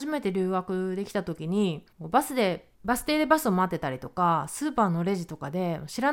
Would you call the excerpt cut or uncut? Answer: cut